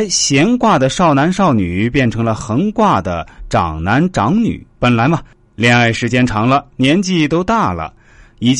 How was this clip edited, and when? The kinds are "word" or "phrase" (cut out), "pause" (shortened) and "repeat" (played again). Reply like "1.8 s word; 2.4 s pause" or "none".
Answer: 4.7 s pause